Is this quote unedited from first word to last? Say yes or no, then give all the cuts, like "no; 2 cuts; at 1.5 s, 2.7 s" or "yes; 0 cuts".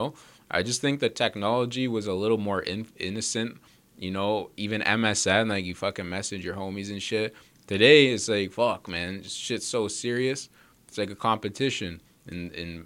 yes; 0 cuts